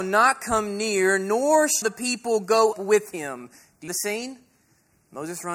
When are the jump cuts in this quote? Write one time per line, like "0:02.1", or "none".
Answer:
0:01.8
0:02.7
0:03.9